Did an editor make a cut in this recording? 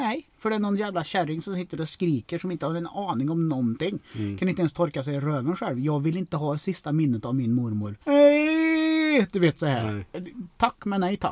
yes; 1 cut; at 8.0 s

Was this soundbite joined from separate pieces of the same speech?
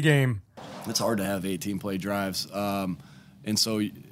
no; 0 cuts

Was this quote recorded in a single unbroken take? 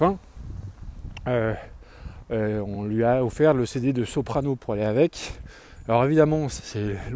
yes; 0 cuts

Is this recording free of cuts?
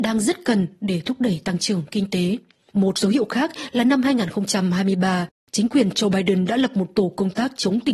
yes; 0 cuts

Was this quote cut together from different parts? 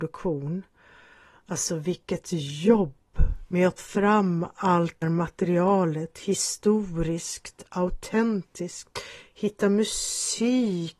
yes; 2 cuts; at 3.8 s, 5.0 s

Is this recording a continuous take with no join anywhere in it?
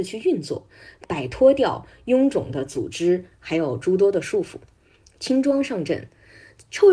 yes; 0 cuts

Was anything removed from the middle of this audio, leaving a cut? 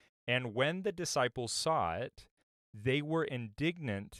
no; 0 cuts

